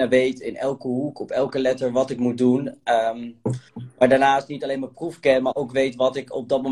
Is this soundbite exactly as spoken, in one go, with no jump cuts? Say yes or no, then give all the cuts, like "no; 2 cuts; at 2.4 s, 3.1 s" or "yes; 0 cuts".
yes; 0 cuts